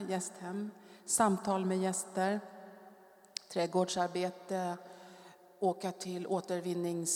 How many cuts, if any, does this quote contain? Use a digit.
0